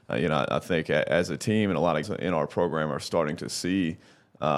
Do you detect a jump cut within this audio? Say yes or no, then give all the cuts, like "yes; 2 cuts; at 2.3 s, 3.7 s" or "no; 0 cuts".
yes; 1 cut; at 2.0 s